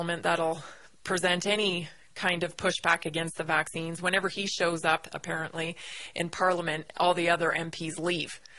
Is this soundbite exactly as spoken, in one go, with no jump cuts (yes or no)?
yes